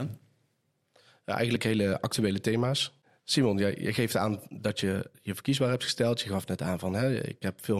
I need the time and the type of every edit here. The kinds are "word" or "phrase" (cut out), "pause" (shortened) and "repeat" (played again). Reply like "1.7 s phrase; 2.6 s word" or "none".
none